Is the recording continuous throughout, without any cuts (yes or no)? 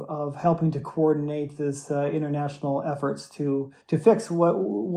no